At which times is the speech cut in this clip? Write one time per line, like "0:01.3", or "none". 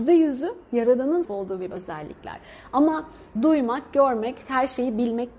0:01.2
0:01.7
0:03.4